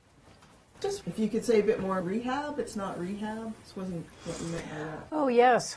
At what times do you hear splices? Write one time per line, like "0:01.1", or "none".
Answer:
0:01.0
0:02.0
0:03.6
0:04.1